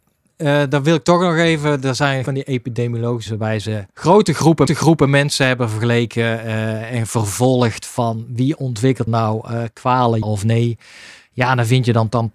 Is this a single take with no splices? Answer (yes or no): no